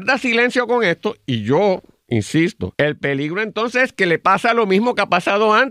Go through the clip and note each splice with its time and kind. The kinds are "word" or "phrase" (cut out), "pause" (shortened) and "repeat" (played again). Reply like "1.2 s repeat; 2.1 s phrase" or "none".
none